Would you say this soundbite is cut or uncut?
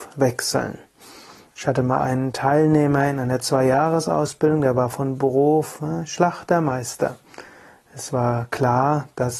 uncut